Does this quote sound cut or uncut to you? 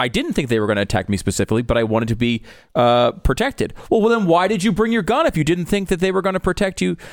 uncut